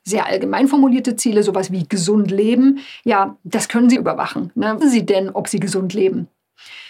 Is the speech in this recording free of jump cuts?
no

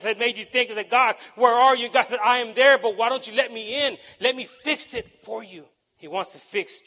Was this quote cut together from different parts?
yes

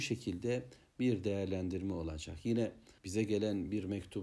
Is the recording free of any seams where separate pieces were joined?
no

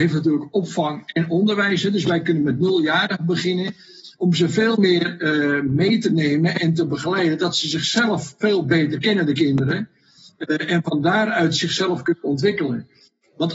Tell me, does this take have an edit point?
no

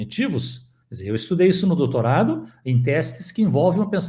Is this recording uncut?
yes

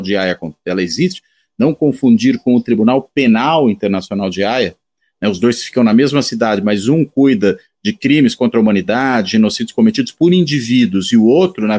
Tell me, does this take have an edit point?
no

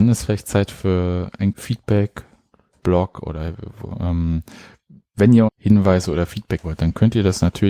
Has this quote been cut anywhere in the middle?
yes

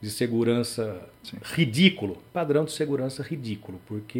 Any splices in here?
yes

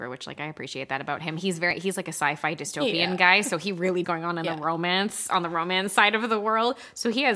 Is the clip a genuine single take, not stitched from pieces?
no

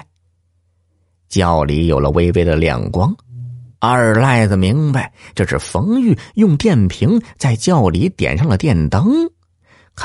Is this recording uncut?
no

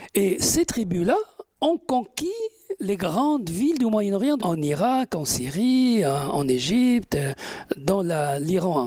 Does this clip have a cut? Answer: yes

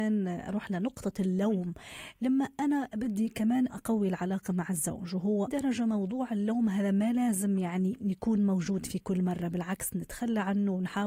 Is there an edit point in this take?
yes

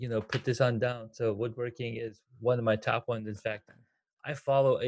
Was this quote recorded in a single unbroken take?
yes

